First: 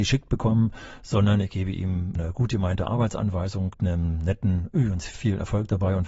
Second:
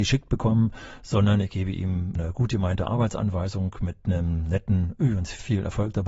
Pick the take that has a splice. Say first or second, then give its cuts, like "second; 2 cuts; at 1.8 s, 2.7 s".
first; 1 cut; at 3.7 s